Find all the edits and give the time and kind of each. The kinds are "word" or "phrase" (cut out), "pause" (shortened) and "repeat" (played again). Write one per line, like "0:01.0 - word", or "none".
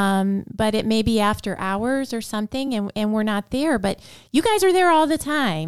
none